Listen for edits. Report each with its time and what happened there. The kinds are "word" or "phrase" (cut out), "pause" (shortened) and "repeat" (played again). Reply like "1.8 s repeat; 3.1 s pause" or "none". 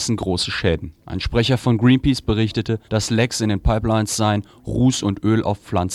1.0 s pause; 2.8 s pause